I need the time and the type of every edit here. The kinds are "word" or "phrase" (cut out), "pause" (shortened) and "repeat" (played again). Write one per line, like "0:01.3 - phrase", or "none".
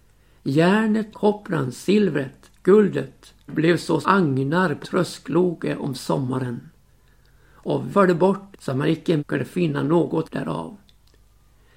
0:01.1 - word
0:03.5 - word
0:04.0 - word
0:04.8 - word
0:07.9 - word
0:08.5 - word
0:09.2 - word
0:10.2 - word